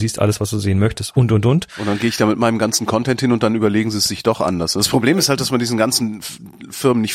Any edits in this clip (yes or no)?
no